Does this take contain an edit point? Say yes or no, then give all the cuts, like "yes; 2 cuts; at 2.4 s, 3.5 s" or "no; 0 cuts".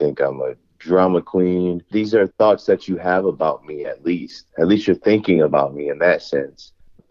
no; 0 cuts